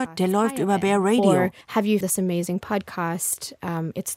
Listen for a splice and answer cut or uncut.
cut